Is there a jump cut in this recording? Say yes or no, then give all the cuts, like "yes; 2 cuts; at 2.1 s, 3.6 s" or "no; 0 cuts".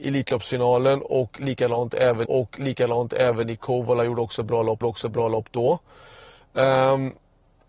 yes; 2 cuts; at 2.3 s, 4.8 s